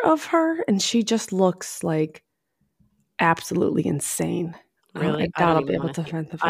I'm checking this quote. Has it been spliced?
no; 0 cuts

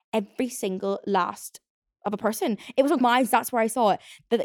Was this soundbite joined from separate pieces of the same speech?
yes; 2 cuts; at 2.0 s, 3.0 s

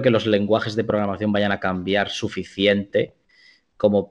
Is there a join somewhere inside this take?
no; 0 cuts

